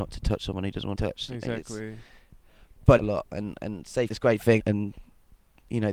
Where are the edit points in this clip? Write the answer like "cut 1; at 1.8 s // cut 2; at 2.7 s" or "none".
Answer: cut 1; at 0.9 s // cut 2; at 3.0 s // cut 3; at 4.1 s // cut 4; at 4.6 s